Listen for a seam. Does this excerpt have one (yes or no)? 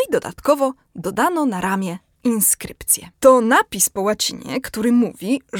yes